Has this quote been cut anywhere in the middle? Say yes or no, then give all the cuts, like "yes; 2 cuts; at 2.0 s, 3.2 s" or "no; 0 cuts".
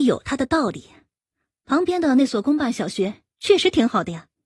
no; 0 cuts